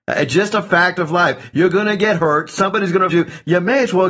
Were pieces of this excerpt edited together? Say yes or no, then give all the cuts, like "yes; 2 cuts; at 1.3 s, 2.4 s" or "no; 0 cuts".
yes; 1 cut; at 3.1 s